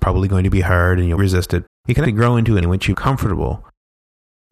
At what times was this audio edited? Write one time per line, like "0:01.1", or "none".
0:01.2
0:01.7
0:02.0
0:02.6
0:02.9